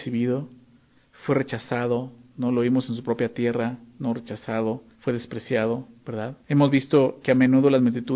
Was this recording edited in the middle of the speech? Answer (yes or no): yes